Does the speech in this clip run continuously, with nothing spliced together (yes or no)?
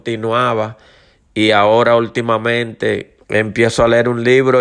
no